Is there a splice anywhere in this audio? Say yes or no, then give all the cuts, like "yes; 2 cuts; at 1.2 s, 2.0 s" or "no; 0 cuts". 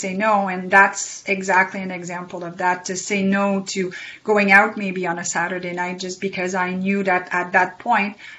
no; 0 cuts